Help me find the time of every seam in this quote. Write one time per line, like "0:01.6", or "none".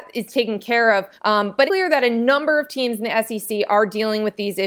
0:01.1
0:01.7